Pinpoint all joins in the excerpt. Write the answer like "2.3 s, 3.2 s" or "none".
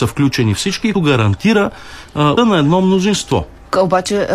0.9 s, 2.4 s